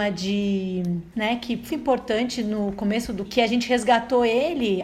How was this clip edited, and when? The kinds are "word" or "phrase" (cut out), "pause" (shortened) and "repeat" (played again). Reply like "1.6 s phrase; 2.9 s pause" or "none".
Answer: 1.1 s word; 1.7 s word; 3.3 s phrase